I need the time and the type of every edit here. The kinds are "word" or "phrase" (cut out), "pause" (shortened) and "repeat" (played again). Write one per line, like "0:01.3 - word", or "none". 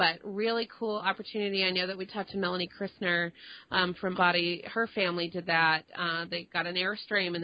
0:04.1 - word